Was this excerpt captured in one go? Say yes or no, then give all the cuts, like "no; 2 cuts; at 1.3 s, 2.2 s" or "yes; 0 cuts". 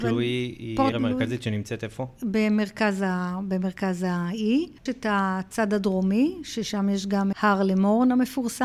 no; 3 cuts; at 0.9 s, 4.9 s, 7.3 s